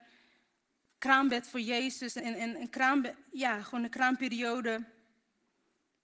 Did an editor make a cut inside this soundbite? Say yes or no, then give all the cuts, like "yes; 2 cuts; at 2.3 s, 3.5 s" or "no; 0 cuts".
yes; 1 cut; at 2.2 s